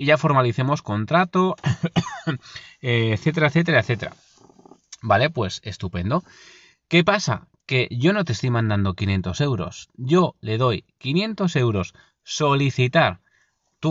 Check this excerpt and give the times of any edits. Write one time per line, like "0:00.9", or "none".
none

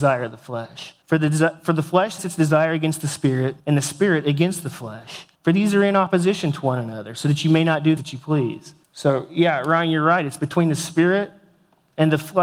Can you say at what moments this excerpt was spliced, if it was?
0:01.0
0:02.2
0:03.6
0:05.4
0:08.0
0:08.8

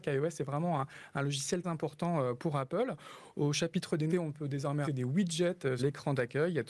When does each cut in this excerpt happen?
0:01.6
0:04.1
0:04.8
0:05.8

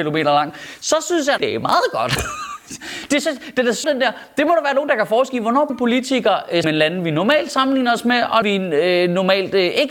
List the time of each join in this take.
0:01.4
0:03.8
0:05.7
0:06.6
0:08.4

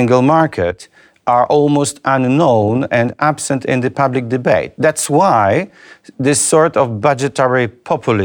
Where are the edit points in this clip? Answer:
none

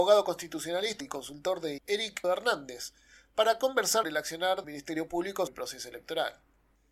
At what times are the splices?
0:01.0
0:01.8
0:02.2
0:04.0
0:04.6
0:05.5

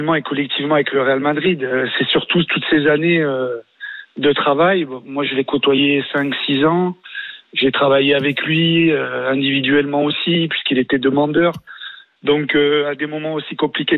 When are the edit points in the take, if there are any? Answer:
none

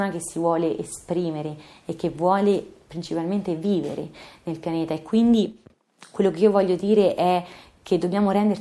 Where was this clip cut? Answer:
none

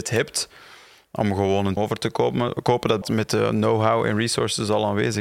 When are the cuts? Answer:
0:01.8
0:03.0

